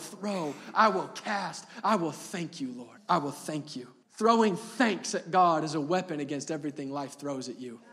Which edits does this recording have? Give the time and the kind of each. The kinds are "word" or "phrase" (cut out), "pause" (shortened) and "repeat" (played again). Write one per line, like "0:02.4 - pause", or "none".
0:03.0 - pause
0:04.0 - pause